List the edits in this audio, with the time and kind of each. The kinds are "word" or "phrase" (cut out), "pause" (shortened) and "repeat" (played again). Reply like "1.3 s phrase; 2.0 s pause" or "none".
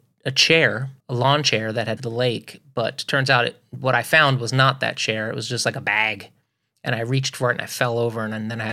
1.0 s pause; 2.0 s phrase